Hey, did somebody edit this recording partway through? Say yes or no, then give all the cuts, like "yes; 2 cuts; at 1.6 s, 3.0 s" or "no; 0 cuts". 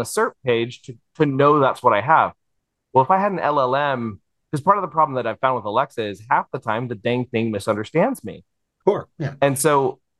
no; 0 cuts